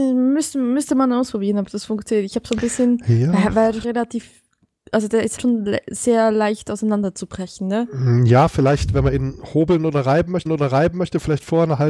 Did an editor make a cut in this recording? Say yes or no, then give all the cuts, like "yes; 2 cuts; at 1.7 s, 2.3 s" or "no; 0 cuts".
yes; 3 cuts; at 3.8 s, 5.4 s, 10.5 s